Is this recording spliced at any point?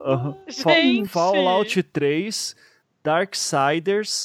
no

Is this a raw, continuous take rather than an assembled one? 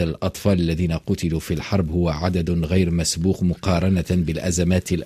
yes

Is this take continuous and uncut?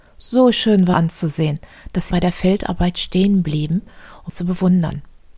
no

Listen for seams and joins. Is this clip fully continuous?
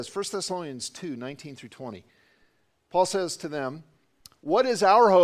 yes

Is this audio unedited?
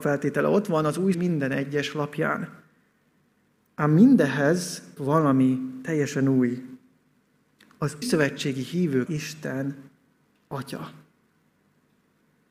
no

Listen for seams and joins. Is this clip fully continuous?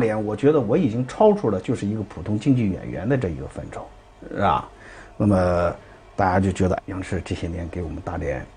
no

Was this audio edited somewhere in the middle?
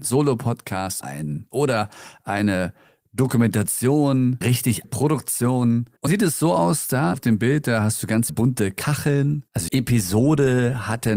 yes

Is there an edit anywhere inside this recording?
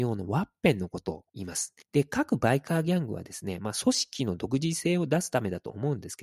yes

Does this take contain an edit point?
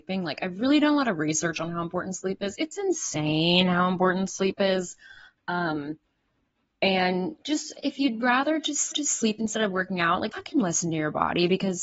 yes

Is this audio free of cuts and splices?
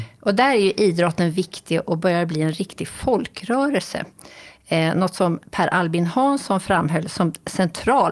yes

